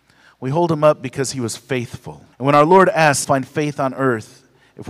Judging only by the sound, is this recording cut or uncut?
cut